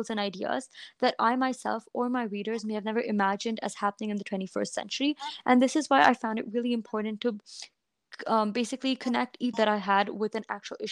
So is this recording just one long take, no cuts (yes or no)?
no